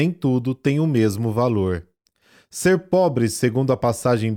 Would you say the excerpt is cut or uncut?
uncut